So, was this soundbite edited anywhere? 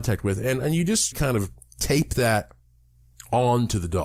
yes; 1 cut; at 1.1 s

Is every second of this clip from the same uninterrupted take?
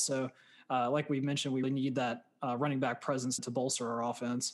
no; 2 cuts; at 1.6 s, 3.4 s

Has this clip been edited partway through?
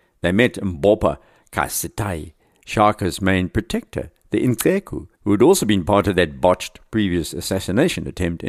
yes; 1 cut; at 5.1 s

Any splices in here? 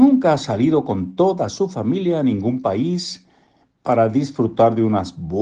no; 0 cuts

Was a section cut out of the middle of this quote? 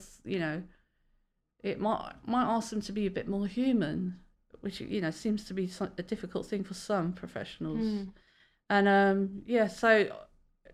no; 0 cuts

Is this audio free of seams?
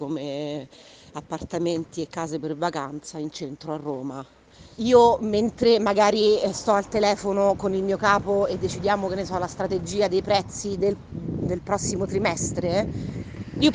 yes; 0 cuts

